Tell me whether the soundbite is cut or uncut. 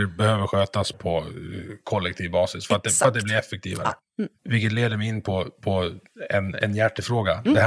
cut